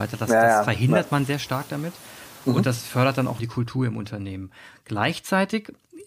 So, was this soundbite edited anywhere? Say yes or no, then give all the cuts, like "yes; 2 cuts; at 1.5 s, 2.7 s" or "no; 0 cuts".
yes; 1 cut; at 3.4 s